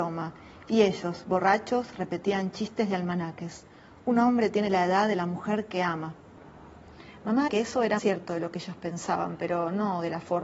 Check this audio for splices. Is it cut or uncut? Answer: cut